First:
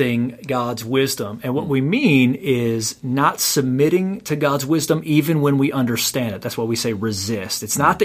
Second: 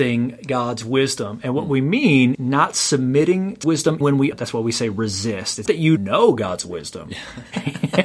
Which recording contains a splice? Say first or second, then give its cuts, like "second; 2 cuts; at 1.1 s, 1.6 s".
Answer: second; 6 cuts; at 2.3 s, 3.6 s, 4.0 s, 4.3 s, 5.7 s, 6.0 s